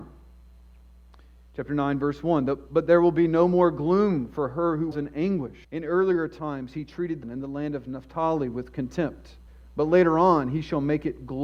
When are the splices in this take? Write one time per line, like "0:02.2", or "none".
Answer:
0:04.9
0:05.6
0:07.2
0:09.5